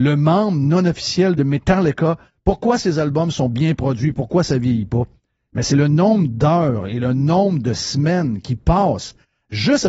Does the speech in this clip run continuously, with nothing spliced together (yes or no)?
yes